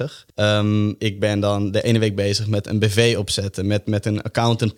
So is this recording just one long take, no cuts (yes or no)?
yes